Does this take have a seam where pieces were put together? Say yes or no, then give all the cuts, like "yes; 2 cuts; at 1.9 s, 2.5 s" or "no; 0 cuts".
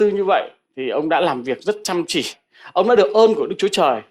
no; 0 cuts